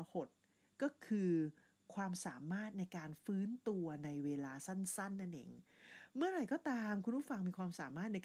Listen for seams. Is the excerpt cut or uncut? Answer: uncut